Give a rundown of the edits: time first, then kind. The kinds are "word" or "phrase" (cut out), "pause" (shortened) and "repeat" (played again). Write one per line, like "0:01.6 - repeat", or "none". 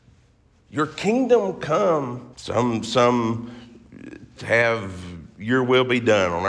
0:02.3 - pause
0:04.4 - word